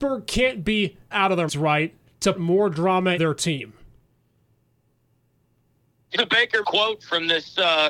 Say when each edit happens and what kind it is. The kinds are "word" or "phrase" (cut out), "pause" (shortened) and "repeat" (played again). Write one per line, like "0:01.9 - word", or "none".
0:01.1 - word
0:01.5 - word
0:02.3 - word
0:03.2 - word
0:06.1 - word
0:06.6 - word